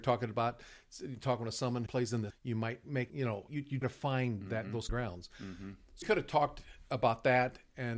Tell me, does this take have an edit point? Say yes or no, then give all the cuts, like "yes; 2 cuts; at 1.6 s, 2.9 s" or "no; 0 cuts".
yes; 7 cuts; at 1.9 s, 2.3 s, 3.1 s, 3.5 s, 3.8 s, 4.9 s, 6.0 s